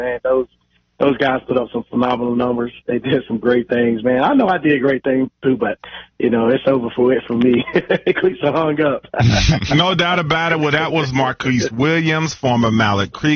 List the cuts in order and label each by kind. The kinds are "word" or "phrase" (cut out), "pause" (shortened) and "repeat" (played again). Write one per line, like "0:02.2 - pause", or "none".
0:05.3 - pause